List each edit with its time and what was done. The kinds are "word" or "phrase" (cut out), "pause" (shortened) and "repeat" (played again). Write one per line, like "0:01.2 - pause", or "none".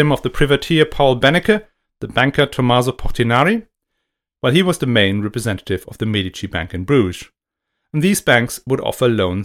none